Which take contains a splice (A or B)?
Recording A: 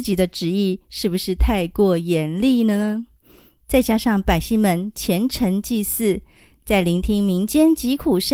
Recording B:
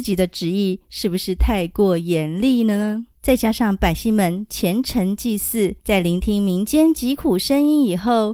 B